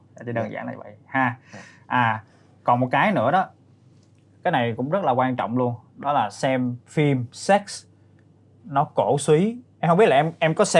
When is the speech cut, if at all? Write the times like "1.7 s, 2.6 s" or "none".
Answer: none